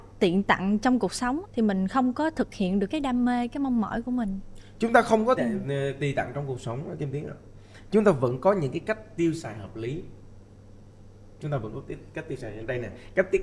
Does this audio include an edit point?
yes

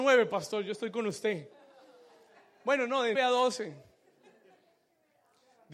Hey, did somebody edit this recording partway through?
yes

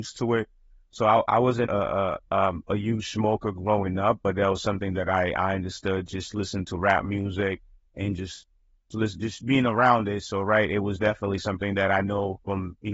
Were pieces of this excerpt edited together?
yes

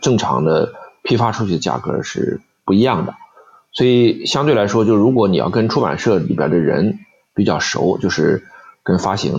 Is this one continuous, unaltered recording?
yes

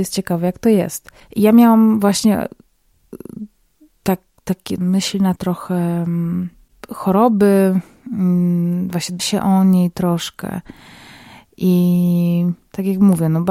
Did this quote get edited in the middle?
yes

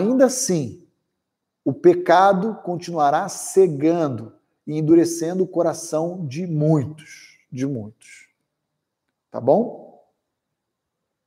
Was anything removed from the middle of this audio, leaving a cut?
no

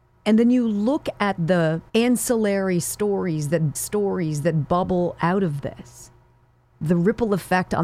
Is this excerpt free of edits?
no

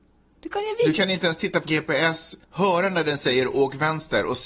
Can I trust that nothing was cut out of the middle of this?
no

